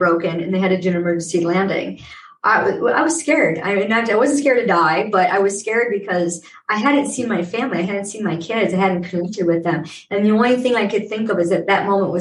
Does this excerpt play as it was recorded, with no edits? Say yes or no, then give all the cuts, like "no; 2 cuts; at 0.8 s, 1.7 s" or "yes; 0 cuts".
yes; 0 cuts